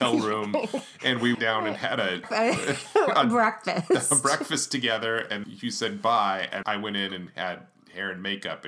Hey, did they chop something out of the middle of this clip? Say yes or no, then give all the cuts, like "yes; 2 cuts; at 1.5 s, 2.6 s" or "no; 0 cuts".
yes; 4 cuts; at 1.3 s, 2.2 s, 5.4 s, 6.6 s